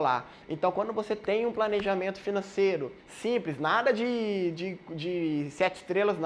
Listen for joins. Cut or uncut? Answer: cut